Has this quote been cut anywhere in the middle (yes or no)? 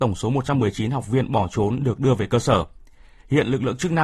no